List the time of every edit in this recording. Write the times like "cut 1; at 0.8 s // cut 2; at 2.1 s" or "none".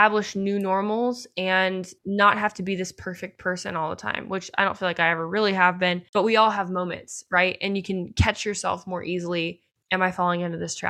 cut 1; at 2.0 s // cut 2; at 6.1 s // cut 3; at 9.8 s